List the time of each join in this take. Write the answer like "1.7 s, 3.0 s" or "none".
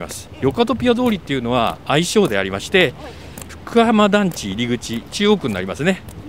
3.5 s